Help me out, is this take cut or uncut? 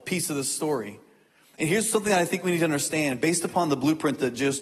uncut